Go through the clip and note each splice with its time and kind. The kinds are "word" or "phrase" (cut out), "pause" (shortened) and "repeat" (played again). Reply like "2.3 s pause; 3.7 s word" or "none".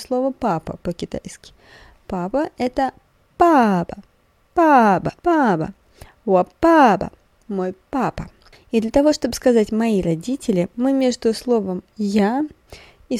5.2 s pause